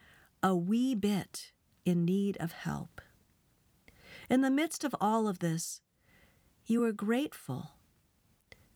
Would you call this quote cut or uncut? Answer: uncut